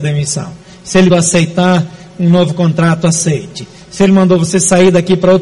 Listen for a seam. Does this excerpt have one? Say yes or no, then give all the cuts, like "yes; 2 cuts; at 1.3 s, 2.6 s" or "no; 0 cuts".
yes; 1 cut; at 1.1 s